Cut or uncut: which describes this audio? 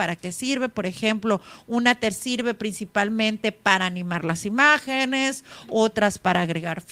uncut